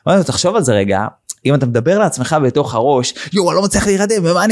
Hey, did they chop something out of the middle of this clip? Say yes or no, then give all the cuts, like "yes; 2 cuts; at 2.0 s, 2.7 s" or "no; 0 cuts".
no; 0 cuts